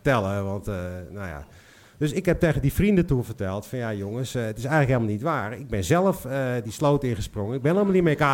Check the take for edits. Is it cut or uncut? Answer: uncut